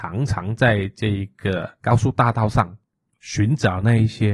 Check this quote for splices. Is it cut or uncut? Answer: uncut